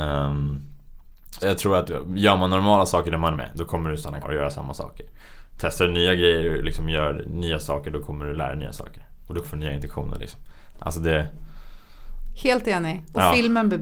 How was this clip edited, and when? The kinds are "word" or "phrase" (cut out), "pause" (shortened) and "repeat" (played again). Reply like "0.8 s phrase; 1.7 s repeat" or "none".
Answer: 1.4 s word; 3.4 s word; 4.2 s word; 9.4 s word